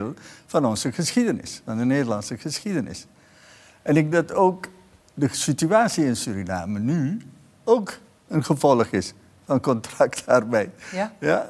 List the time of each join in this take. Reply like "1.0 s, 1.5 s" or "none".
4.1 s